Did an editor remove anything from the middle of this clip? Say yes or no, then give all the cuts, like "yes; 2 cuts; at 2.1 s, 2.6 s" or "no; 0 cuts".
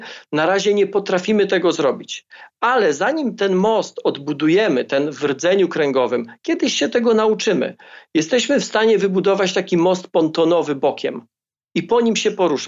no; 0 cuts